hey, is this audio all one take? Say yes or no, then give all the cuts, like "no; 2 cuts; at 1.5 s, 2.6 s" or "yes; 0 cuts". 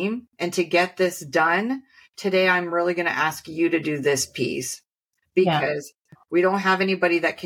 yes; 0 cuts